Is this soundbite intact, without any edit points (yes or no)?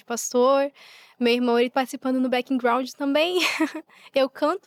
no